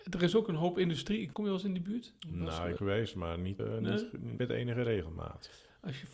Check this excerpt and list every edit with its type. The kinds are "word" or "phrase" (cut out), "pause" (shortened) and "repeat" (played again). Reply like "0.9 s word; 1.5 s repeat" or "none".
1.3 s phrase; 2.2 s pause; 2.8 s phrase; 3.6 s word; 4.4 s word